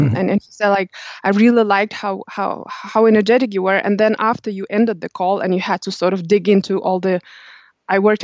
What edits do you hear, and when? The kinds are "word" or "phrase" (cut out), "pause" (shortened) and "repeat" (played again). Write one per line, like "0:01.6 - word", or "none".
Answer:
none